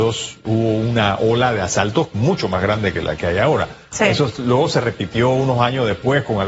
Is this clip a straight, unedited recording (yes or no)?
no